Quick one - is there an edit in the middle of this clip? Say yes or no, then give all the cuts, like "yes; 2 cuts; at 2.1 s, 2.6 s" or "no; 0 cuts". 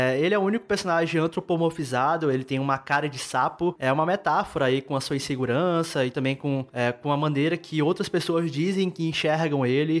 no; 0 cuts